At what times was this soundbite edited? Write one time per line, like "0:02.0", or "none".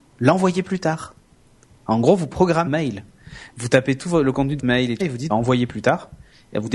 0:02.7
0:04.6
0:05.0
0:05.3